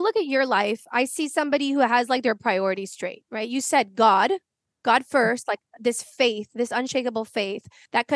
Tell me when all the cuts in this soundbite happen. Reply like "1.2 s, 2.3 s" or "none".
none